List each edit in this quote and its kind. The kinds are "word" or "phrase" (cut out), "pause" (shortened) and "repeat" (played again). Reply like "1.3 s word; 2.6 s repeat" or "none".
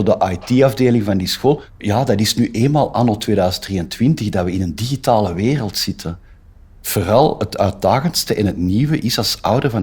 none

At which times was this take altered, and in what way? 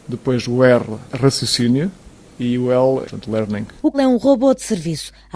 1.1 s pause; 3.0 s phrase; 3.9 s word

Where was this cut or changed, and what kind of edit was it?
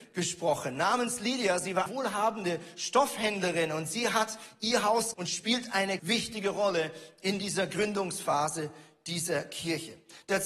1.9 s word; 5.1 s word; 6.0 s word

